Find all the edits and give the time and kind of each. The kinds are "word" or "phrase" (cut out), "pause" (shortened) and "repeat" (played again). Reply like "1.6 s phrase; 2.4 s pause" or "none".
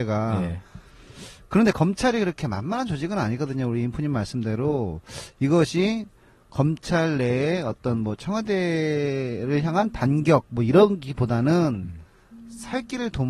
none